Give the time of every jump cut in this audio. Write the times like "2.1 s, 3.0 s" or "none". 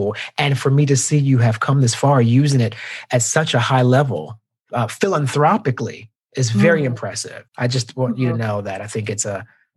6.2 s, 7.5 s